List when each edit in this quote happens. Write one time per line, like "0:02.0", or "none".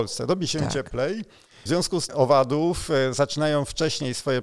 0:01.7
0:02.1